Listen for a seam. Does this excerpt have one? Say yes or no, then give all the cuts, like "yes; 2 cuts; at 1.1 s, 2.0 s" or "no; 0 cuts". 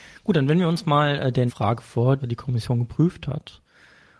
yes; 2 cuts; at 1.5 s, 2.2 s